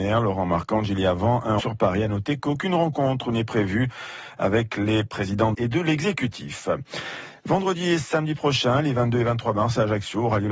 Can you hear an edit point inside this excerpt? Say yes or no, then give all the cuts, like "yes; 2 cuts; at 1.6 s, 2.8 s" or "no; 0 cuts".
yes; 2 cuts; at 1.6 s, 5.5 s